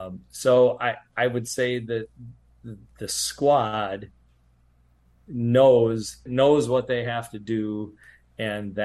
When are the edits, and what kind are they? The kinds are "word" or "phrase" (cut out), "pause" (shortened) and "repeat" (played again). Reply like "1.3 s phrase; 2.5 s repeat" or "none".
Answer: 2.9 s word; 6.3 s word